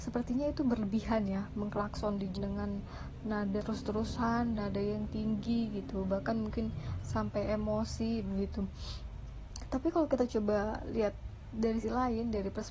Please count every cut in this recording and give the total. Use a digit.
4